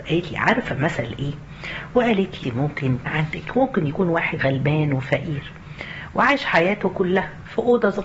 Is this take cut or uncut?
cut